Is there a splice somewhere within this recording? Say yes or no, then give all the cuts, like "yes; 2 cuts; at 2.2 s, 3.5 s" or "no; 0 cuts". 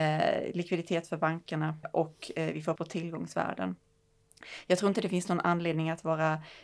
yes; 2 cuts; at 1.8 s, 2.8 s